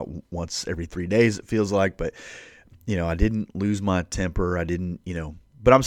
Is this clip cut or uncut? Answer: uncut